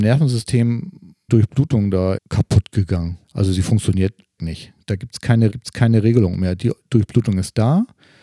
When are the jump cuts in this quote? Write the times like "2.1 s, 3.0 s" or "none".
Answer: 1.3 s, 2.2 s, 3.2 s, 4.4 s, 5.5 s